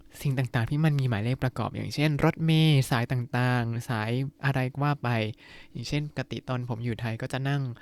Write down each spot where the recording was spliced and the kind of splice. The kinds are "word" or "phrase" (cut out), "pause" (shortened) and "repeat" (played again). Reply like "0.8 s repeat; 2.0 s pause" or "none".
4.3 s pause